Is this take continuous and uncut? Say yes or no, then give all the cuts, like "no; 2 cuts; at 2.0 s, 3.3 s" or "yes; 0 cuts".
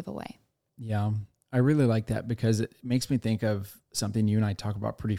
yes; 0 cuts